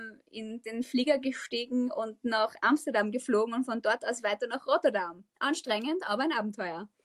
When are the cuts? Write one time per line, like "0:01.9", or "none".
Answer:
0:05.3